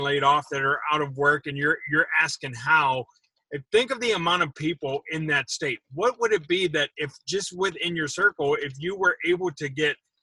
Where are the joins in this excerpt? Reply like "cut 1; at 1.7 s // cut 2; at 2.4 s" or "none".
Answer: none